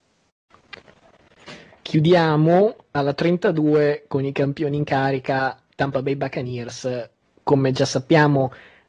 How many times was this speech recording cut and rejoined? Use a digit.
0